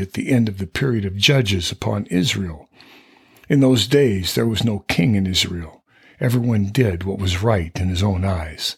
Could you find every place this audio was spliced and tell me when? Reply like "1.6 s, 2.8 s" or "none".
none